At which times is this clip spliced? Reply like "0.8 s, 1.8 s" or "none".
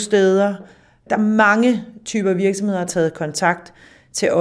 2.9 s